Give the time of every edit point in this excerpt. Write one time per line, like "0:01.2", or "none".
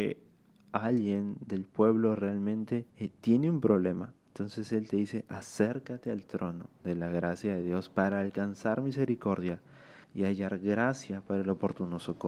0:02.9
0:04.2
0:06.8
0:10.0